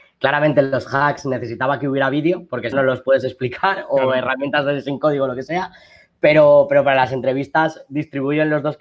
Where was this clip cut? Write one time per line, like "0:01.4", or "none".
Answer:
0:02.7